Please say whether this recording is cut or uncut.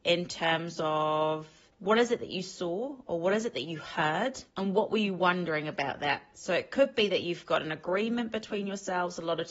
cut